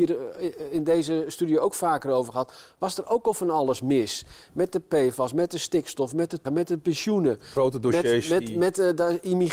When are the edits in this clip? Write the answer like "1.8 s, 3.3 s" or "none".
6.4 s